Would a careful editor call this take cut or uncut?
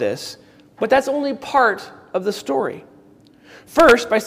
uncut